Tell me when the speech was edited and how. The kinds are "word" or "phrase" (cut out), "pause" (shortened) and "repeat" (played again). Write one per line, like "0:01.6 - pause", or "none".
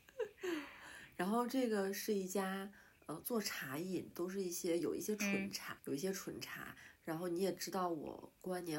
0:03.0 - pause
0:04.1 - phrase
0:05.8 - word